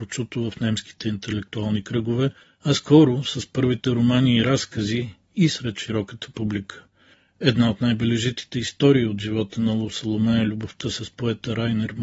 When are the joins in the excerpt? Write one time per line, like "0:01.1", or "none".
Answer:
none